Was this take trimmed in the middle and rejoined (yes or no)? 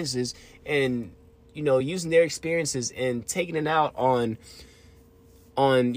no